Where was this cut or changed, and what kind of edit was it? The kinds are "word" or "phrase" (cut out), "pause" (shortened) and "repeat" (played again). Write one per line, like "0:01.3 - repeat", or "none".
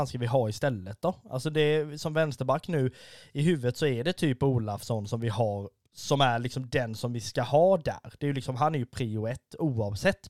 none